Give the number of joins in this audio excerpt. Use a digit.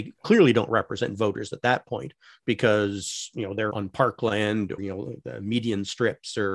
2